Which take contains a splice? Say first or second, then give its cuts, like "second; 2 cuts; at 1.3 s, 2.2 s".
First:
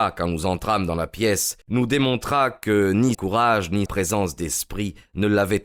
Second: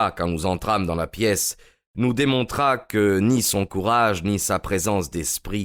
first; 3 cuts; at 1.6 s, 3.1 s, 3.9 s